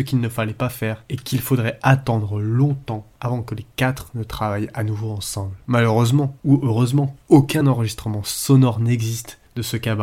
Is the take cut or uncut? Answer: uncut